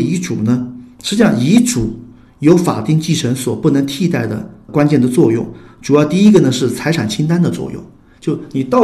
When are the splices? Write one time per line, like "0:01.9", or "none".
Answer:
none